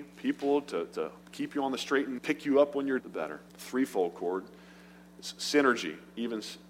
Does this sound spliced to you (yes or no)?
yes